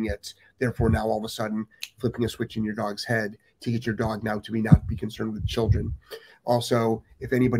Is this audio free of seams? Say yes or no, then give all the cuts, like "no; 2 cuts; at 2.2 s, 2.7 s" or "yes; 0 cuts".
yes; 0 cuts